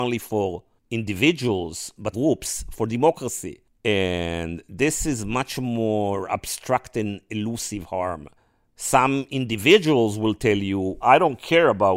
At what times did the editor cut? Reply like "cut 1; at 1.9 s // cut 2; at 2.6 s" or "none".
cut 1; at 2.1 s // cut 2; at 8.4 s // cut 3; at 11.0 s